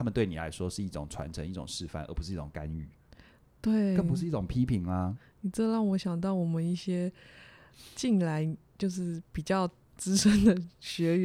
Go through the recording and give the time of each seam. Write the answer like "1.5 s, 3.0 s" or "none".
none